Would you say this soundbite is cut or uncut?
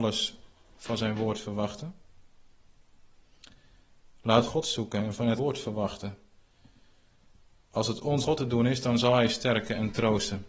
cut